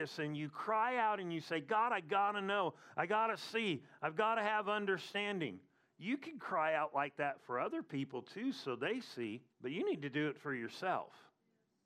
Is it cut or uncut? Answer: cut